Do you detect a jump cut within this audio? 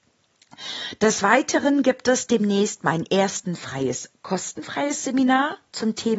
no; 0 cuts

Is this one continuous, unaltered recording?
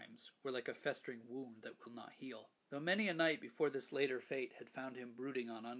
no; 1 cut; at 2.6 s

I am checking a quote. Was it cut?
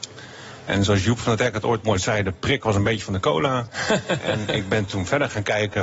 no; 0 cuts

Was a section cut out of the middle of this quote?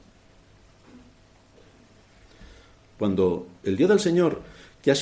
no; 0 cuts

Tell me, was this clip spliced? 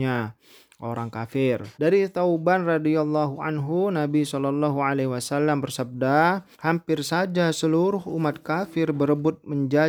yes; 2 cuts; at 1.7 s, 6.5 s

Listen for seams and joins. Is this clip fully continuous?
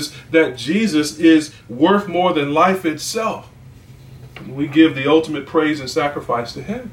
yes; 0 cuts

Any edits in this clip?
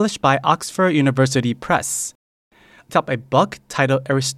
yes; 1 cut; at 2.9 s

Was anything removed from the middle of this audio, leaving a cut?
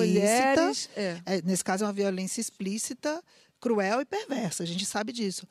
no; 0 cuts

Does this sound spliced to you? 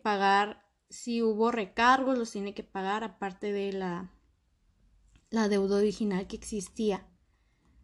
no; 0 cuts

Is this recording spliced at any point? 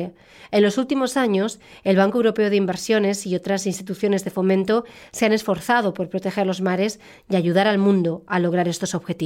no; 0 cuts

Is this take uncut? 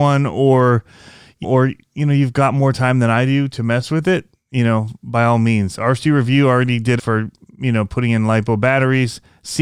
no; 2 cuts; at 1.4 s, 7.0 s

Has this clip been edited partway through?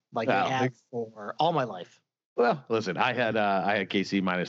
no; 0 cuts

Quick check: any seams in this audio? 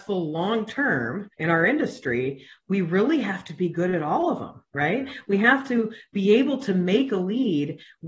yes; 1 cut; at 1.3 s

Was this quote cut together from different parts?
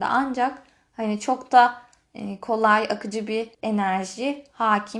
yes; 1 cut; at 3.5 s

